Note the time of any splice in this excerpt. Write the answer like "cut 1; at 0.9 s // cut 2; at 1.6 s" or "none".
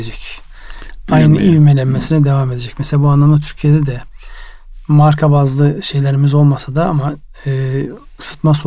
none